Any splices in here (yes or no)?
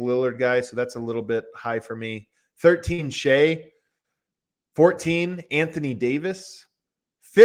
no